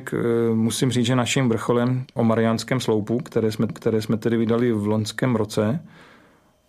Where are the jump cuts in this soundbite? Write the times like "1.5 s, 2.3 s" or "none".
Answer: 2.2 s, 3.7 s